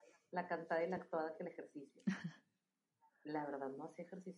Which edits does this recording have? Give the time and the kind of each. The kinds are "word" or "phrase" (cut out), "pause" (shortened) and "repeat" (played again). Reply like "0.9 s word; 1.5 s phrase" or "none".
none